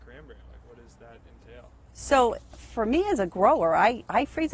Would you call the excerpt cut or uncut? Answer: uncut